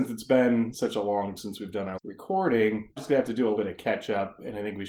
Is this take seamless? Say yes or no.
no